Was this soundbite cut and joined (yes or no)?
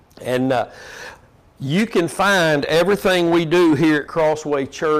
yes